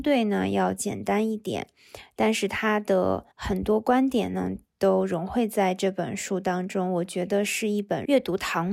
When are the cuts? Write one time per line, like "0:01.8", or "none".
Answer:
0:03.3